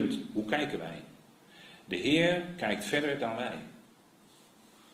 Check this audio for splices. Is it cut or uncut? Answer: uncut